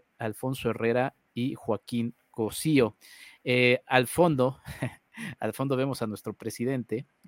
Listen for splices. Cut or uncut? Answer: uncut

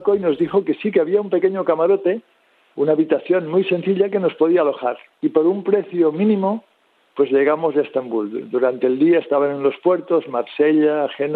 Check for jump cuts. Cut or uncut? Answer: uncut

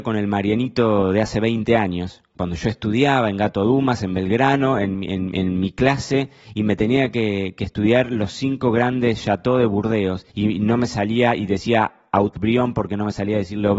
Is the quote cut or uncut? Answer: cut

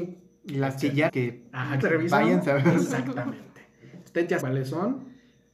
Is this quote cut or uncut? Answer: cut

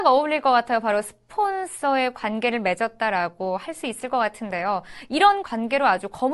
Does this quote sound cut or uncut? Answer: uncut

